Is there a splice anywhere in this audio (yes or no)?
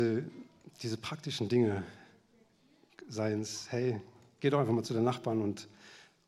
no